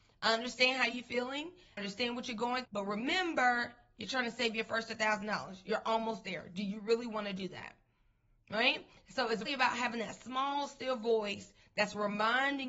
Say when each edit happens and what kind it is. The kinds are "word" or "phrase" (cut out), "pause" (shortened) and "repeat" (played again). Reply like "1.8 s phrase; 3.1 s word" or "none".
1.8 s word; 2.7 s word; 9.5 s word